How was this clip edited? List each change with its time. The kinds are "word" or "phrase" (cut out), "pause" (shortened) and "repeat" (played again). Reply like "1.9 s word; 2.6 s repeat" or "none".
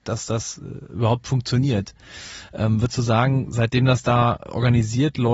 none